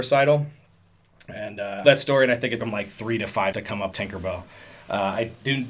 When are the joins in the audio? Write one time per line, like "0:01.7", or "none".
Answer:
0:01.8
0:02.6
0:03.5
0:03.9